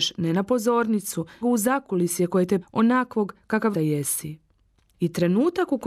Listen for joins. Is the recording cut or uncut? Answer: cut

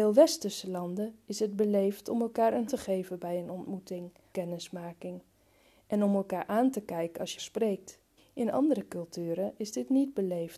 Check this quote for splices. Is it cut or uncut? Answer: cut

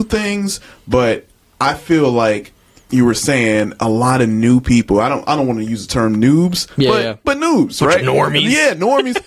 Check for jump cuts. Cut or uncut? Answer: uncut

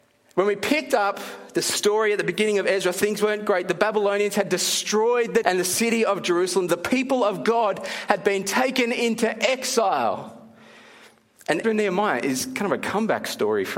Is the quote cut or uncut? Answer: cut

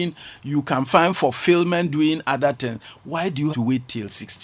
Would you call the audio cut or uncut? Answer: cut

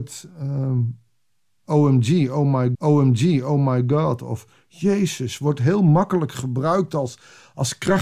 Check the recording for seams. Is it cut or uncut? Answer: cut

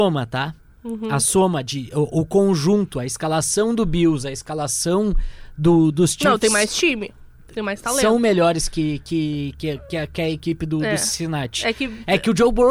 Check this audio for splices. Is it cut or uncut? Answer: uncut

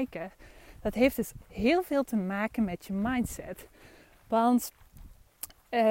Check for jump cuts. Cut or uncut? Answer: uncut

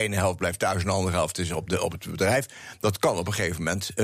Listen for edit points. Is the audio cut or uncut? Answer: uncut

